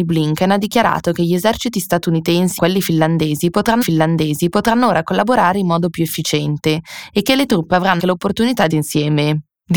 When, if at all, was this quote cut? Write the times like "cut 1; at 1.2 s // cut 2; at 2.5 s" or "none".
cut 1; at 2.6 s // cut 2; at 3.8 s // cut 3; at 8.0 s // cut 4; at 8.7 s